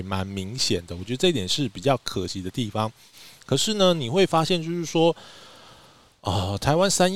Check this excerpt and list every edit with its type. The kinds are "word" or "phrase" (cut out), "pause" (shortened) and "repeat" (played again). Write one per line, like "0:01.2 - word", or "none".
none

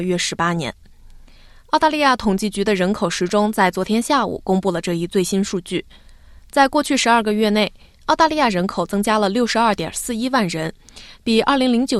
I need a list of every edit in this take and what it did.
none

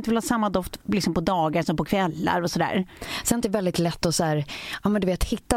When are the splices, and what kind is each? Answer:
0:03.4 - phrase

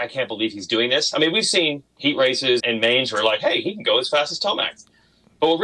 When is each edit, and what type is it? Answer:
0:02.6 - word

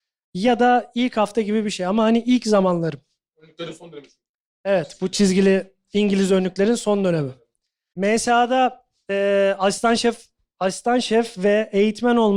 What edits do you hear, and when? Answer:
none

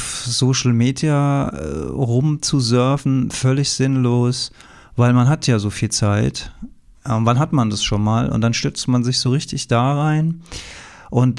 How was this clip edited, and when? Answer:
none

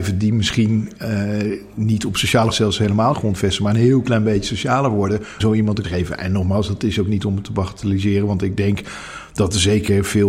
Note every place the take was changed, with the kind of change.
0:02.5 - phrase
0:03.1 - phrase
0:05.4 - word
0:05.8 - word

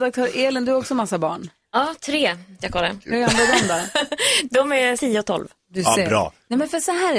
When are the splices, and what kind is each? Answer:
0:02.6 - word
0:05.0 - word

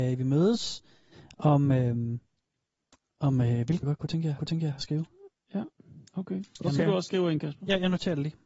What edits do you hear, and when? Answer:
0:03.8 - word
0:04.4 - repeat
0:06.1 - pause

